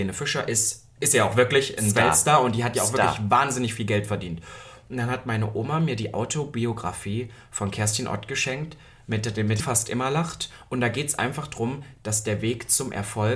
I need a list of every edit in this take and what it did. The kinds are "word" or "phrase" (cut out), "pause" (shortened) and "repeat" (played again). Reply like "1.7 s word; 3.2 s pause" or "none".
9.6 s phrase